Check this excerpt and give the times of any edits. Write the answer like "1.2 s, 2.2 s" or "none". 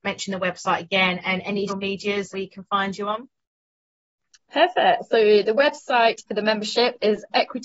1.7 s, 2.3 s, 6.3 s